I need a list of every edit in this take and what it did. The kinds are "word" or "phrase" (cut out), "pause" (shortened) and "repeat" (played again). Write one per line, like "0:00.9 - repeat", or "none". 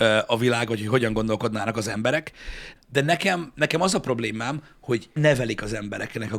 0:02.8 - word
0:05.2 - word

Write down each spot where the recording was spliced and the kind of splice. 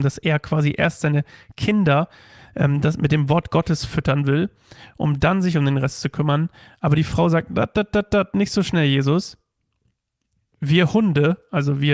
none

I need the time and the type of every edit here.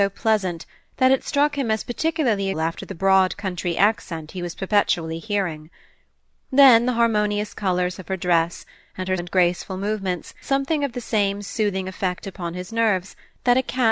0:02.5 - word
0:09.2 - word
0:10.4 - word

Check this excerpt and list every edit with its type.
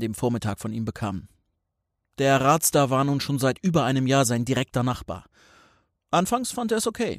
none

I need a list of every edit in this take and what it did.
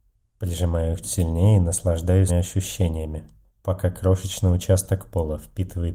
0:01.0 - word
0:02.3 - word
0:03.5 - pause

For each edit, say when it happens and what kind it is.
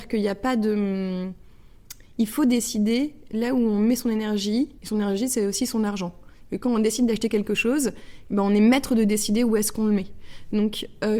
0:04.8 - pause

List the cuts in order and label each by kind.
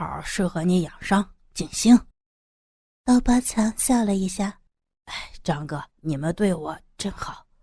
0:02.1 - pause
0:04.7 - pause
0:05.9 - pause

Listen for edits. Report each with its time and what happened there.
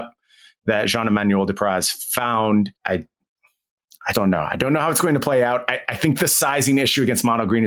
0:02.8 - pause
0:04.1 - word

